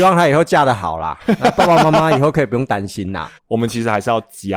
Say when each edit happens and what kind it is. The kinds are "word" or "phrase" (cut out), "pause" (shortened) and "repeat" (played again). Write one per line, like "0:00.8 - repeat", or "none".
0:03.4 - pause